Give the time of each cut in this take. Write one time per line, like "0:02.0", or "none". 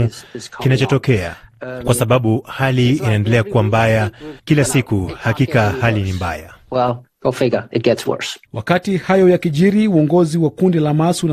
0:04.4
0:08.4